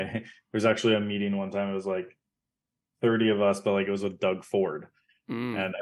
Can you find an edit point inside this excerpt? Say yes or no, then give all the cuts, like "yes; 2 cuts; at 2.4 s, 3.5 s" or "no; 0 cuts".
no; 0 cuts